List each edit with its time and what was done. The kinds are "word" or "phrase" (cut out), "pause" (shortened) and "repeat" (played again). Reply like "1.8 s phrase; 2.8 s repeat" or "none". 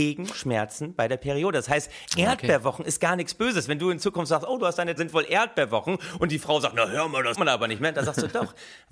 5.0 s word; 7.3 s word